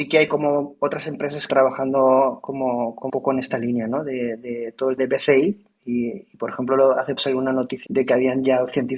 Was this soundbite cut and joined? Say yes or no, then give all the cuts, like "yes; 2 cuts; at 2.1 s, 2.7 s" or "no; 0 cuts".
yes; 5 cuts; at 1.5 s, 3.1 s, 5.0 s, 7.2 s, 7.9 s